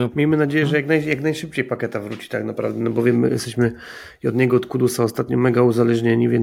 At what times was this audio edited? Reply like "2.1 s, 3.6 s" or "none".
none

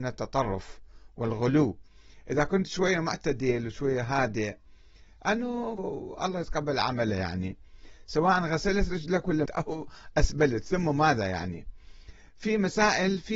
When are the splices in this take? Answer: 5.8 s, 9.5 s

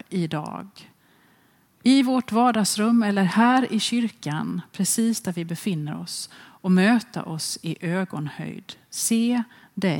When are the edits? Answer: none

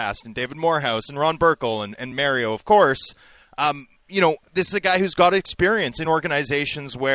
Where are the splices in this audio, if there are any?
none

